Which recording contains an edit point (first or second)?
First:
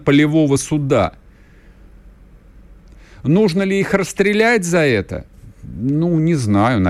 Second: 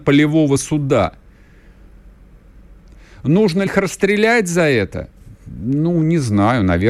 second